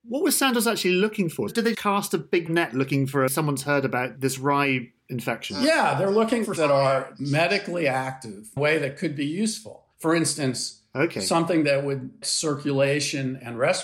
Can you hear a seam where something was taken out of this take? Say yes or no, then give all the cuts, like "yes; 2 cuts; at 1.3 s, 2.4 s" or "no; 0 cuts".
yes; 7 cuts; at 1.7 s, 2.5 s, 3.3 s, 6.6 s, 8.6 s, 9.9 s, 12.2 s